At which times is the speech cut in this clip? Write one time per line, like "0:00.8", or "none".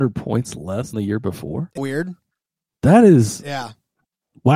0:00.9
0:01.8